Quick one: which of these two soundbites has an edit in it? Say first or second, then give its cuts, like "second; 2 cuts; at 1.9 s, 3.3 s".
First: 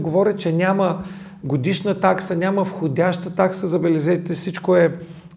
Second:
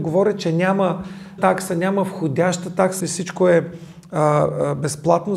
second; 2 cuts; at 1.4 s, 3.0 s